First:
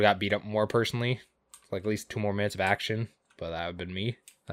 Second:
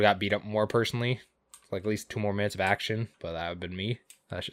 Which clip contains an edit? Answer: second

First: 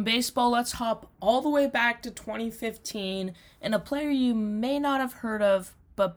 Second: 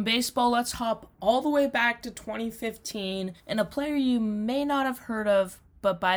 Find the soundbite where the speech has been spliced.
second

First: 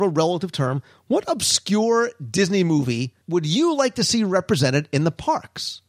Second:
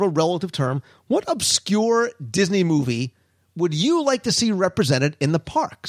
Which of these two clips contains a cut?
first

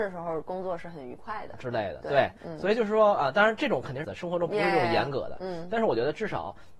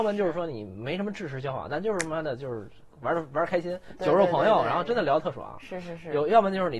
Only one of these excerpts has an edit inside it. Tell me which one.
first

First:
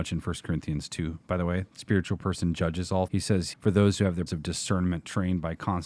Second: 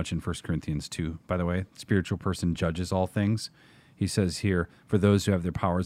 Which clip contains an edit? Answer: first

